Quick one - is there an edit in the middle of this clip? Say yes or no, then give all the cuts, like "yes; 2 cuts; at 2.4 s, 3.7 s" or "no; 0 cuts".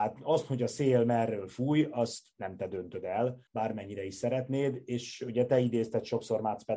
yes; 1 cut; at 3.5 s